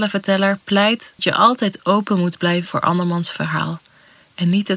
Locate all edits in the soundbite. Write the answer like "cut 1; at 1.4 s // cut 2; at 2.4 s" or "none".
cut 1; at 1.2 s // cut 2; at 2.6 s

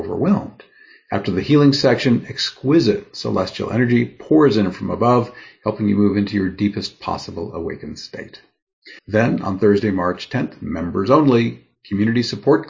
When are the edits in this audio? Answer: cut 1; at 9.0 s

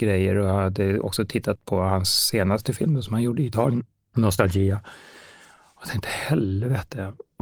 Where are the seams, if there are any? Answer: none

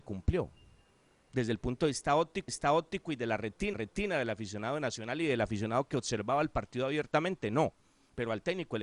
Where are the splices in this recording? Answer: cut 1; at 2.5 s // cut 2; at 3.7 s

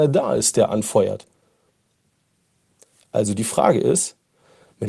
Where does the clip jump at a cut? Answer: none

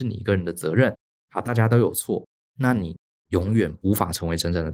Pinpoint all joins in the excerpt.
none

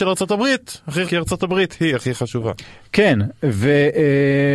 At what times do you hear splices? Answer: cut 1; at 1.0 s

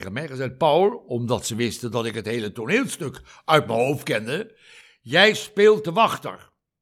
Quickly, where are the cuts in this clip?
none

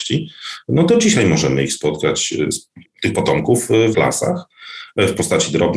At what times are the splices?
cut 1; at 2.8 s // cut 2; at 3.9 s

